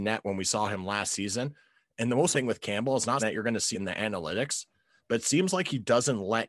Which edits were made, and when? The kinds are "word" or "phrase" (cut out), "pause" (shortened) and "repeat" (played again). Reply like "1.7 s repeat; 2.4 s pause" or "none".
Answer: 2.3 s word; 3.2 s word; 3.7 s word